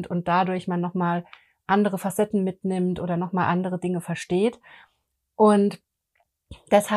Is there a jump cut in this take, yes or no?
no